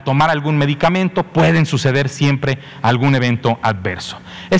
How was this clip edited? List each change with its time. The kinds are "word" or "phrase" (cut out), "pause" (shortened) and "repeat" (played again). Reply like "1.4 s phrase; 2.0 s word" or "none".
none